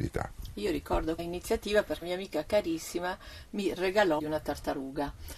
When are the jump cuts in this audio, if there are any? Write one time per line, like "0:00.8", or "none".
0:01.2
0:02.0
0:04.2